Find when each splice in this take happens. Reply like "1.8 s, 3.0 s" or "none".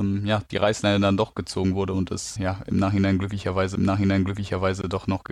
2.4 s, 3.8 s